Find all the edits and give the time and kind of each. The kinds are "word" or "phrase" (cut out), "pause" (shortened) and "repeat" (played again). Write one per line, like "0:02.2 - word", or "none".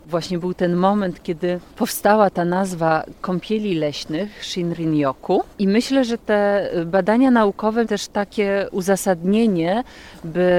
0:01.7 - pause
0:05.5 - pause
0:07.8 - word